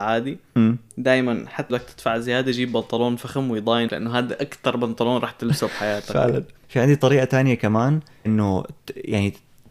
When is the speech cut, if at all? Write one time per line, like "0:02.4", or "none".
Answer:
0:01.7
0:03.9
0:06.5
0:08.3